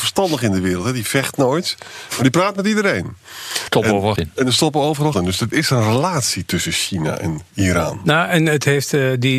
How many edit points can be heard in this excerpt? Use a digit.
4